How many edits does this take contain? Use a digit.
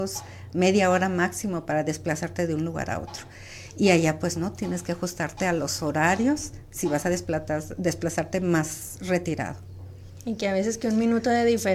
0